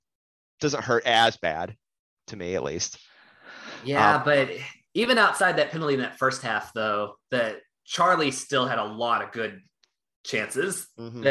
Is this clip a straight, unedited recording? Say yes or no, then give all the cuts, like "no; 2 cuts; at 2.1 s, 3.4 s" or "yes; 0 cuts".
yes; 0 cuts